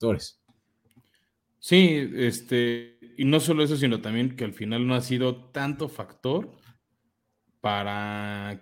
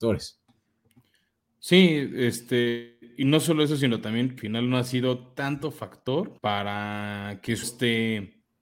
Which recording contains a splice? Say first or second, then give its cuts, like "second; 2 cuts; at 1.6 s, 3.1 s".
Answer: second; 3 cuts; at 4.4 s, 6.4 s, 7.6 s